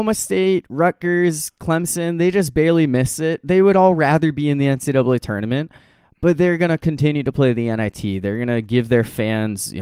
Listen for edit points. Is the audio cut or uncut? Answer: uncut